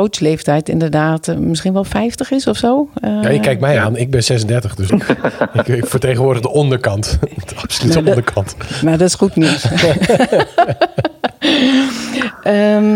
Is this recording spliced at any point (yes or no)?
yes